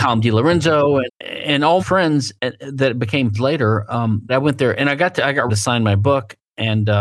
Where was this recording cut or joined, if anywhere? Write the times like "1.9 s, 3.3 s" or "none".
1.1 s, 1.8 s, 2.4 s, 3.3 s, 4.3 s, 5.5 s